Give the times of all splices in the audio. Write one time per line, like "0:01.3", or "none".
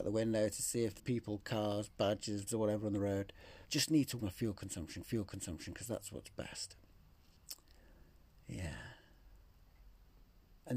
0:01.0
0:02.5
0:03.6
0:04.2
0:05.0